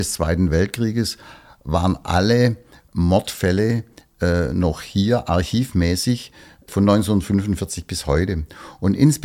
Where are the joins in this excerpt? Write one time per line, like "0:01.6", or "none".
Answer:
none